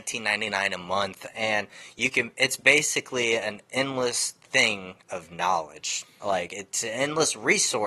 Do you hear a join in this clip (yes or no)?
no